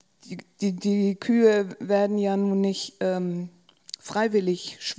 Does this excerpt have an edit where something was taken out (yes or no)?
no